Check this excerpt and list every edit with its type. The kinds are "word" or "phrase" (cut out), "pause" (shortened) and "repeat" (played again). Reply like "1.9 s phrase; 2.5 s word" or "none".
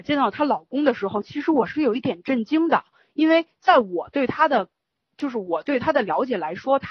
none